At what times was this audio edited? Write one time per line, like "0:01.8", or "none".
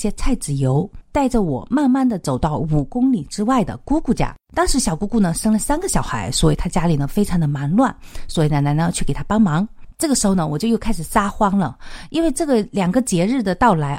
0:04.4